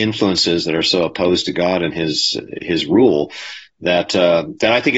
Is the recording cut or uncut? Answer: uncut